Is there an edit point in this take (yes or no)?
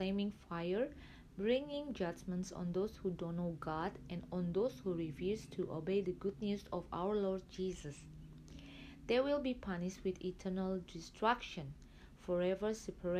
no